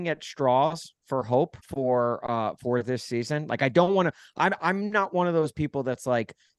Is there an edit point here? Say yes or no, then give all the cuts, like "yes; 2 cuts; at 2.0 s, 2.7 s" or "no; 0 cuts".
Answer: yes; 1 cut; at 1.6 s